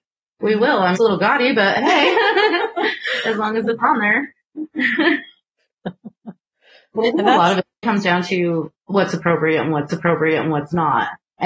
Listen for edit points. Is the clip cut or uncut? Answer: cut